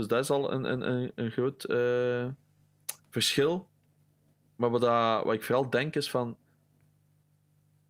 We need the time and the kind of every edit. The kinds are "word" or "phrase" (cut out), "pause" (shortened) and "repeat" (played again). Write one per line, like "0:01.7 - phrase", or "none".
0:03.0 - pause